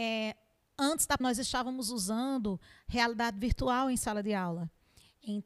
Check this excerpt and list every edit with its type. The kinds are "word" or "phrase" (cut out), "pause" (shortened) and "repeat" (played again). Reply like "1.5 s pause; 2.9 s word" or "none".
1.2 s word